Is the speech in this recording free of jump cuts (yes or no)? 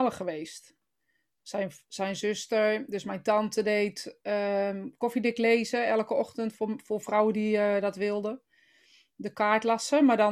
yes